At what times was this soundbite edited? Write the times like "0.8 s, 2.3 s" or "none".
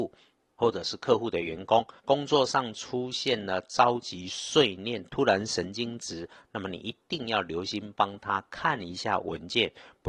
2.0 s